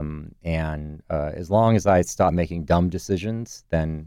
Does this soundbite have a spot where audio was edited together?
no; 0 cuts

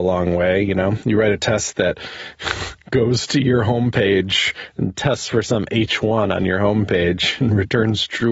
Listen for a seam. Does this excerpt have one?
no; 0 cuts

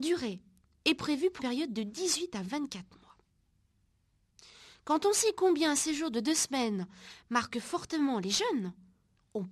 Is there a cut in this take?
yes; 1 cut; at 1.4 s

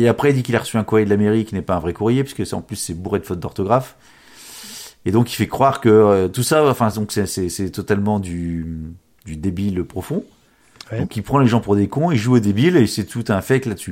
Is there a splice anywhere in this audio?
no; 0 cuts

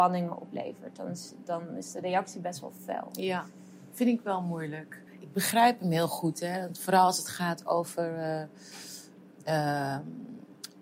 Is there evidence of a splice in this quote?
yes; 1 cut; at 5.1 s

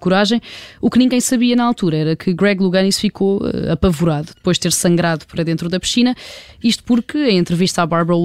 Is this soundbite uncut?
yes; 0 cuts

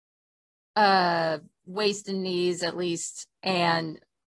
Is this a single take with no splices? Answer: yes; 0 cuts

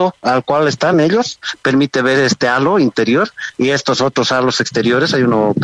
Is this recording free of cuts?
yes; 0 cuts

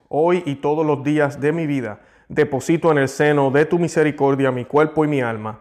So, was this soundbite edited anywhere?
no; 0 cuts

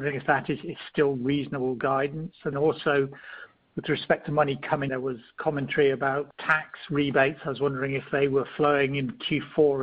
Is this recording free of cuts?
no; 3 cuts; at 2.5 s, 4.9 s, 6.3 s

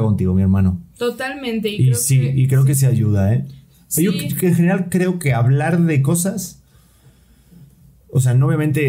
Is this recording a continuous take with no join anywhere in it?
yes; 0 cuts

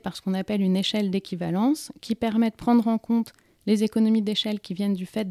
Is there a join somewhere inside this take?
no; 0 cuts

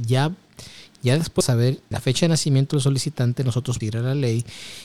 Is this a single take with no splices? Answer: no; 3 cuts; at 1.4 s, 1.9 s, 3.8 s

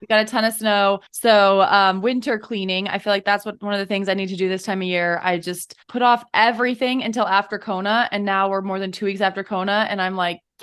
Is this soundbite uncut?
no; 2 cuts; at 1.1 s, 5.8 s

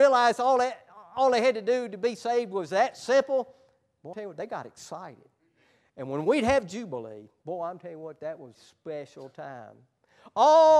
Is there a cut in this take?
yes; 2 cuts; at 4.1 s, 8.5 s

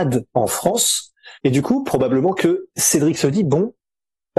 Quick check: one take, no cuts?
no; 1 cut; at 1.3 s

